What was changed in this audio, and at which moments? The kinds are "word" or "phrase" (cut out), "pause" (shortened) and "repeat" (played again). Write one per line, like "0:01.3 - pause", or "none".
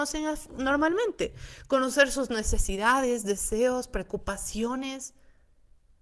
none